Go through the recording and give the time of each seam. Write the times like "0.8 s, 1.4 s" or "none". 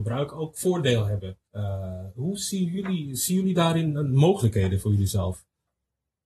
1.5 s